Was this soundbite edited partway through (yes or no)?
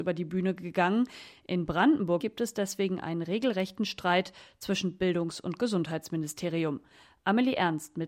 yes